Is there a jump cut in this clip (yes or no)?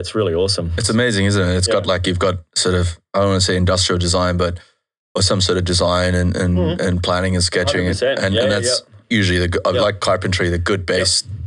no